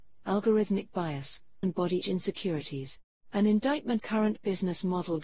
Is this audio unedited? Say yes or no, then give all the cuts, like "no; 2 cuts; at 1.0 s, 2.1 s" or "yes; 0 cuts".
no; 4 cuts; at 1.6 s, 2.0 s, 3.1 s, 4.0 s